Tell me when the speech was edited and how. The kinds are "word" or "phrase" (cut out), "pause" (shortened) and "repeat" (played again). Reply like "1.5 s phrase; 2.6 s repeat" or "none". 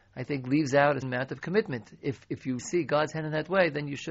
1.0 s word; 2.6 s word